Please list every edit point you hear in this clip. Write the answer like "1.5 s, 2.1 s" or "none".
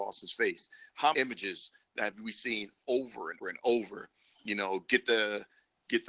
1.1 s, 3.4 s